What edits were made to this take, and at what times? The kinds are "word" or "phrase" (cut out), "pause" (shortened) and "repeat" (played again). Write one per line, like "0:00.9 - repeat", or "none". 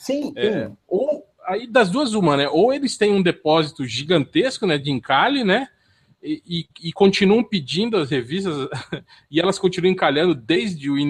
none

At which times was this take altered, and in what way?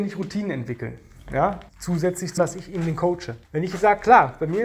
0:01.7 - pause
0:02.4 - word
0:03.4 - pause

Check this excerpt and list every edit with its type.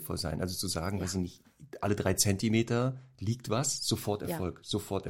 none

